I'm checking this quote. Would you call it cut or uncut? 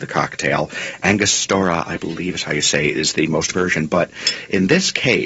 cut